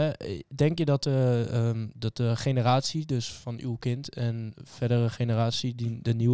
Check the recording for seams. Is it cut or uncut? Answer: uncut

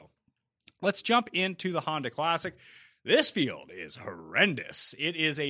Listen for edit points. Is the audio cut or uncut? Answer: uncut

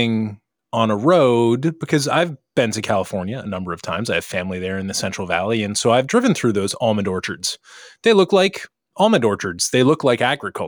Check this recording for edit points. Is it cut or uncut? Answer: uncut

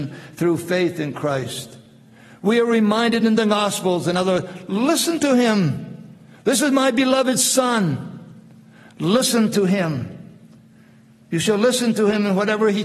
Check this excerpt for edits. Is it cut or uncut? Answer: uncut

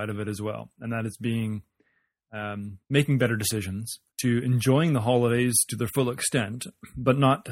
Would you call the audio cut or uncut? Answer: cut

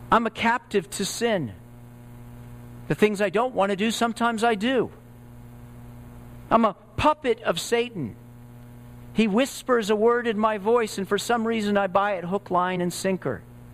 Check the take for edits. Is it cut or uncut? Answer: uncut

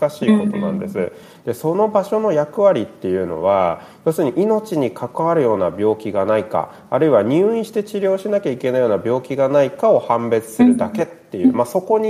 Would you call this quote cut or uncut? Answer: uncut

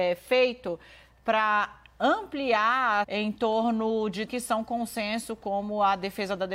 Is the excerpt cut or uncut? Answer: cut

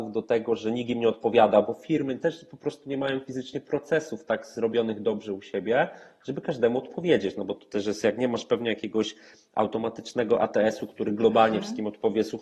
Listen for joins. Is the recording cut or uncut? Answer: uncut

